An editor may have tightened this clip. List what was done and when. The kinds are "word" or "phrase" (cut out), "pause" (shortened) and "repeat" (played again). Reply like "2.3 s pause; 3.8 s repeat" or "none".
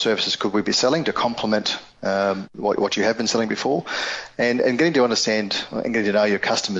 none